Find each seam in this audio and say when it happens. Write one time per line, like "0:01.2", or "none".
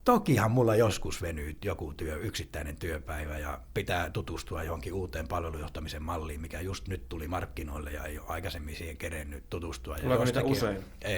none